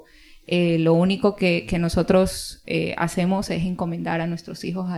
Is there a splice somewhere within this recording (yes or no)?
no